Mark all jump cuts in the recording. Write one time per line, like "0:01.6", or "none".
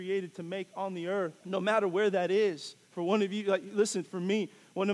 0:01.4
0:02.8